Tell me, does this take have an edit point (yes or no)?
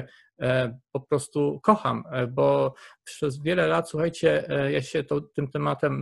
no